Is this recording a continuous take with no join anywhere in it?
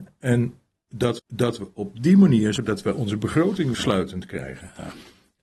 no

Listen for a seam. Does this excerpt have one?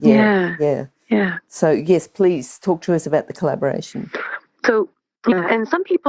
no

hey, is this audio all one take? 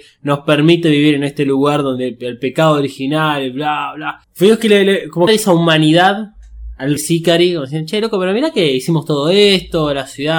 no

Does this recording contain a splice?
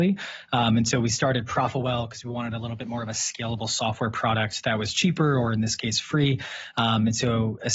no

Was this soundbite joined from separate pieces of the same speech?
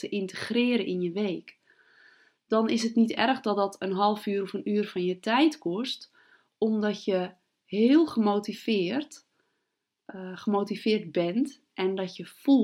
no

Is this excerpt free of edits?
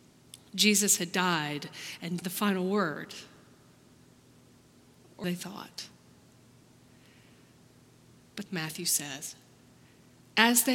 no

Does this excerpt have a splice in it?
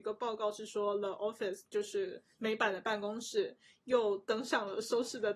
no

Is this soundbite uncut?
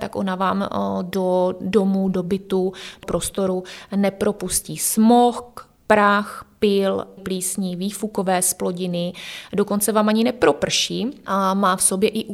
no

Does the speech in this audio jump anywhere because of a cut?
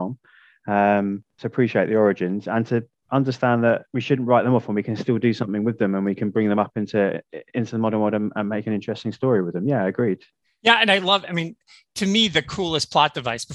no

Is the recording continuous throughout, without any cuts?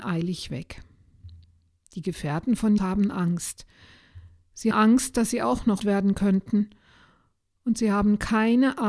no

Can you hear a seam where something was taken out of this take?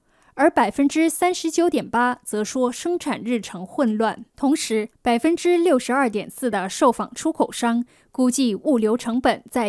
yes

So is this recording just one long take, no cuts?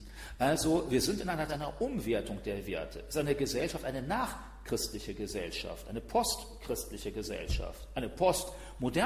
no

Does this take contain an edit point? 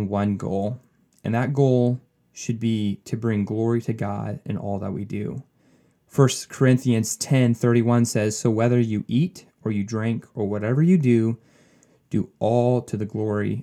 no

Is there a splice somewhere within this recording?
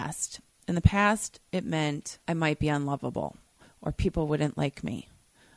yes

